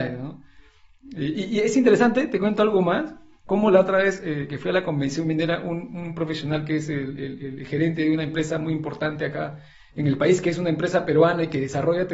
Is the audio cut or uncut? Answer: uncut